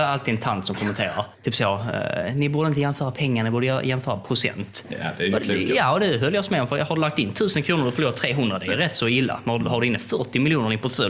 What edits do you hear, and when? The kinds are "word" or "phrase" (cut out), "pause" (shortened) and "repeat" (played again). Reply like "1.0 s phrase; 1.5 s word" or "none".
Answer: 1.3 s pause